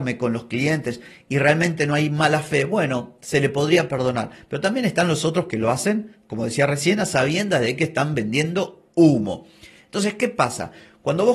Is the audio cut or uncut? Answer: uncut